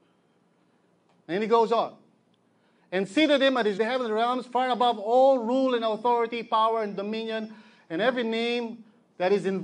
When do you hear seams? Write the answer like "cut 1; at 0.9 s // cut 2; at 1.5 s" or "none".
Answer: cut 1; at 3.8 s